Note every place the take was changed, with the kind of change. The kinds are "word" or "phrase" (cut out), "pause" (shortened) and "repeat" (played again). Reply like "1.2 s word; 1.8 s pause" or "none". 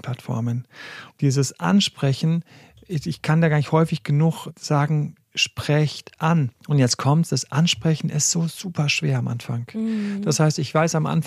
5.2 s pause; 6.6 s pause